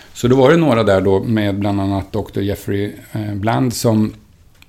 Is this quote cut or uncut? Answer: uncut